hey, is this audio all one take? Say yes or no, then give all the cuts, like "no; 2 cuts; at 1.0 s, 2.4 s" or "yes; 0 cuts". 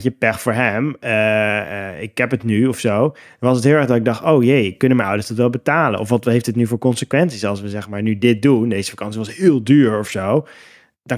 yes; 0 cuts